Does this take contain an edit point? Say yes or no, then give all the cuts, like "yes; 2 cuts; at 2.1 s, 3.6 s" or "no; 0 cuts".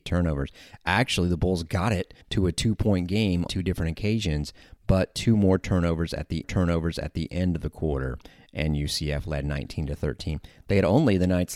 yes; 3 cuts; at 2.2 s, 3.5 s, 6.4 s